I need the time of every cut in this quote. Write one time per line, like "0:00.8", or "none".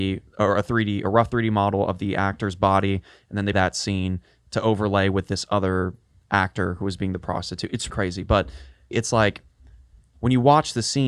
0:03.5
0:07.9
0:08.9